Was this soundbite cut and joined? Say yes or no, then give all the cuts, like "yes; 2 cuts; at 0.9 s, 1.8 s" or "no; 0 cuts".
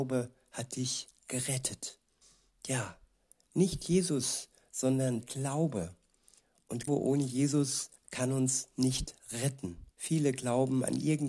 yes; 5 cuts; at 2.2 s, 5.2 s, 6.9 s, 8.0 s, 9.9 s